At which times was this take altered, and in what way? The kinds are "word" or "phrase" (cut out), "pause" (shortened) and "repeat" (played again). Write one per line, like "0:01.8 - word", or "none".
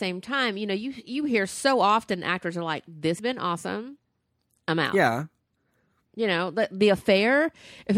0:03.2 - word